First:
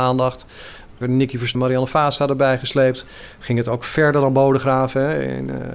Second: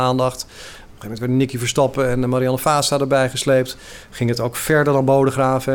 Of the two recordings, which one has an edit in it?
first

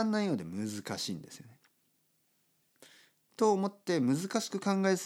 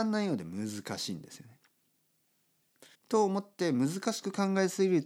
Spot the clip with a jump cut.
second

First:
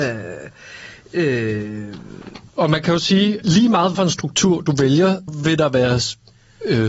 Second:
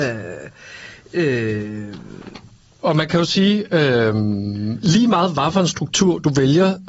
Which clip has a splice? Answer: first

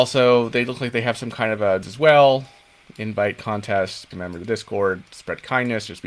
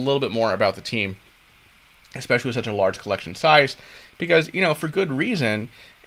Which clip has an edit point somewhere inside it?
first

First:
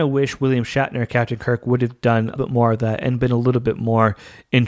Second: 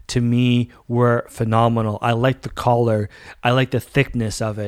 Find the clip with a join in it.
first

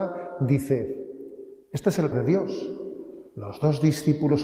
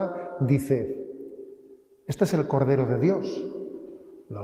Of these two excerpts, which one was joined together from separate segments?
first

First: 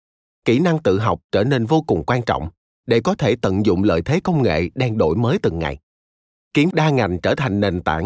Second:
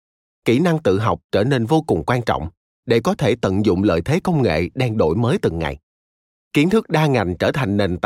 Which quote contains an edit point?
first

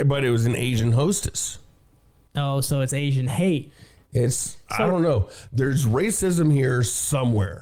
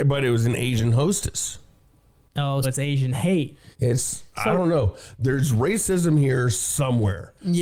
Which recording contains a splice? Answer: second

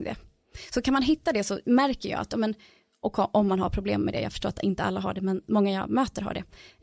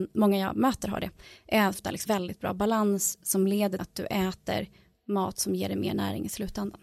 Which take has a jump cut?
second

